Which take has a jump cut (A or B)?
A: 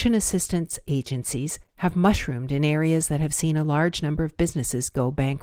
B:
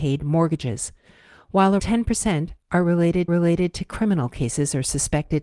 B